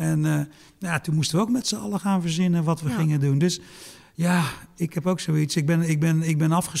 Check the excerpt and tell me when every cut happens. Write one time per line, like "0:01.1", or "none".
none

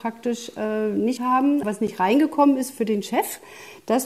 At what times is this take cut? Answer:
0:01.2
0:01.6

